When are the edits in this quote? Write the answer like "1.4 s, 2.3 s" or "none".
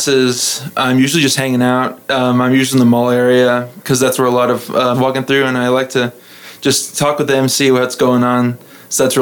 4.9 s